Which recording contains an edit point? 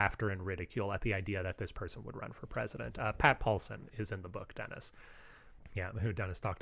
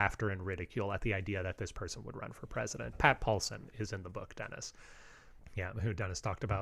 second; 1 cut; at 2.9 s

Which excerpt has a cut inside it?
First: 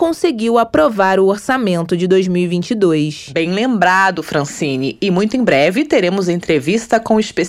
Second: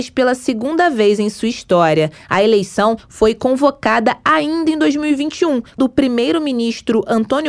second; 1 cut; at 5.8 s

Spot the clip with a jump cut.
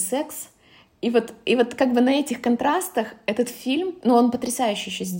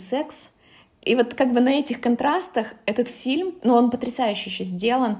second; 1 cut; at 1.0 s

